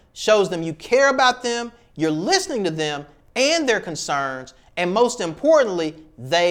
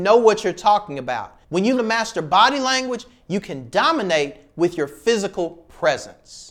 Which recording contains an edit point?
second; 2 cuts; at 1.4 s, 1.8 s

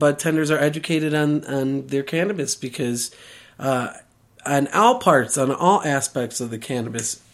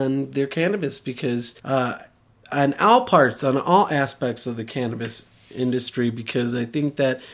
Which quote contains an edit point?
second; 1 cut; at 1.6 s

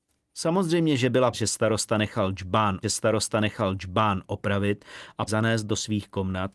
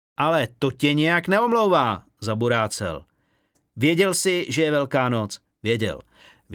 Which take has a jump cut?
first; 3 cuts; at 1.3 s, 2.8 s, 5.3 s

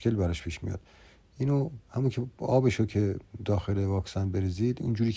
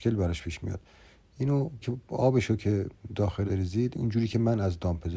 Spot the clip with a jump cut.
second; 2 cuts; at 1.8 s, 3.5 s

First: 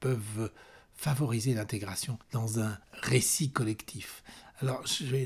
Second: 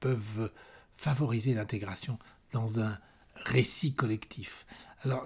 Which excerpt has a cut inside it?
first; 2 cuts; at 2.2 s, 2.8 s

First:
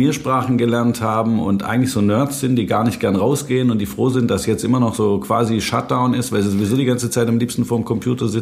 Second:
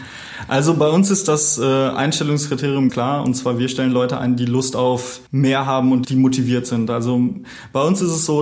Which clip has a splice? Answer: second; 3 cuts; at 2.9 s, 5.3 s, 6.0 s

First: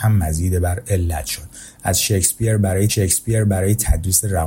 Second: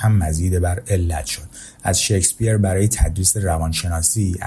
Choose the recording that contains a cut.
first; 1 cut; at 2.9 s

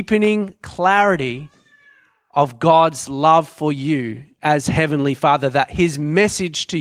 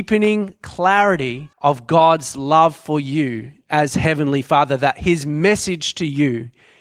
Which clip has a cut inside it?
second; 1 cut; at 1.5 s

